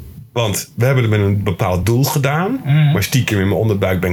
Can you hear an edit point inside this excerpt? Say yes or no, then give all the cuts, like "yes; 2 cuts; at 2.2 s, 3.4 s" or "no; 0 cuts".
no; 0 cuts